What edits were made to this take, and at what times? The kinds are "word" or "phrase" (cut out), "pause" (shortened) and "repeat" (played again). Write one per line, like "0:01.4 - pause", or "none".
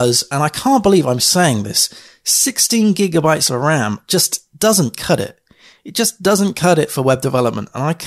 none

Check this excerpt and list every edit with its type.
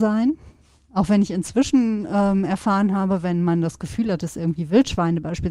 none

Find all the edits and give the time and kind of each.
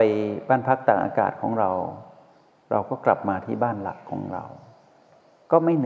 none

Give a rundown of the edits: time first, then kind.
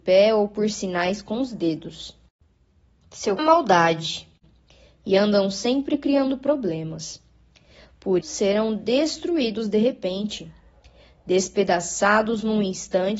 0:03.4 - phrase
0:08.2 - word

